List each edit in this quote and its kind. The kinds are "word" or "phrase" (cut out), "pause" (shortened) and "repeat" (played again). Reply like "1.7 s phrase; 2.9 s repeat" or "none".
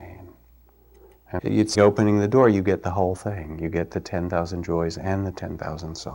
1.4 s phrase; 1.7 s word